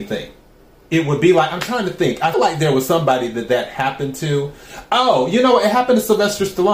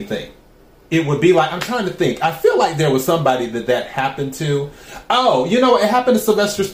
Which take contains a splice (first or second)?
first